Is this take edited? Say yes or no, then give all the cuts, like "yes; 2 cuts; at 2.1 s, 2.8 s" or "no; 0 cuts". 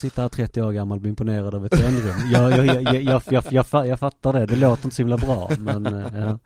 no; 0 cuts